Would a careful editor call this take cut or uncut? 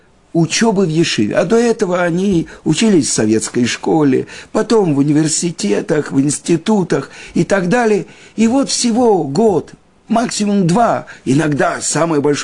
uncut